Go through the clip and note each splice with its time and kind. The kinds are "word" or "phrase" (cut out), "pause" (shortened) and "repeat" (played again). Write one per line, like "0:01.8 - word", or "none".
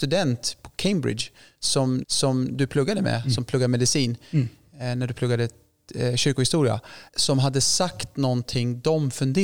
0:02.0 - repeat
0:07.1 - pause